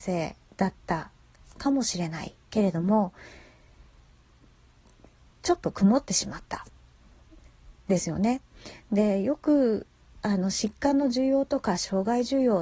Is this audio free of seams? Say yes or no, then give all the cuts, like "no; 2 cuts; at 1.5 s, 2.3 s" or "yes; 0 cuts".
yes; 0 cuts